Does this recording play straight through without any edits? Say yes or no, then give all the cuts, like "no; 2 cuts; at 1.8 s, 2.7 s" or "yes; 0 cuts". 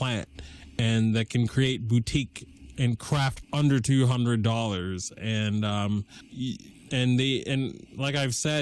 no; 1 cut; at 3.4 s